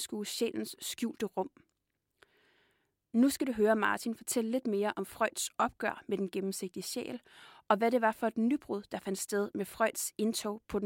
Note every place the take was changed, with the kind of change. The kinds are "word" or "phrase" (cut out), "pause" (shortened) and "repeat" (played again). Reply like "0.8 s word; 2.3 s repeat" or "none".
none

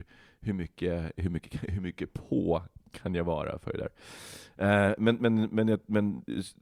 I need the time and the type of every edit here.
none

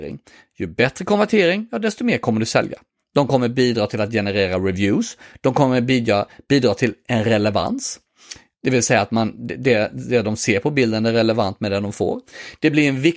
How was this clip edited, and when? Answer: none

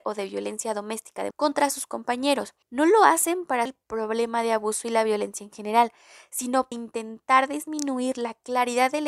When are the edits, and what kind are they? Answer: 1.3 s word; 2.6 s pause; 3.7 s word; 6.7 s word

